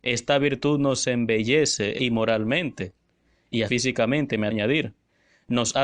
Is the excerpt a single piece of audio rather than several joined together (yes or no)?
no